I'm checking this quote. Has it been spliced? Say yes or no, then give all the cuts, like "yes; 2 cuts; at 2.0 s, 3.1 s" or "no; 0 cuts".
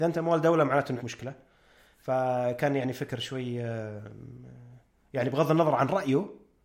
yes; 1 cut; at 1.0 s